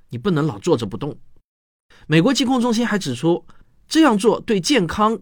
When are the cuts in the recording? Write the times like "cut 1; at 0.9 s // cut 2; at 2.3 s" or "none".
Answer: none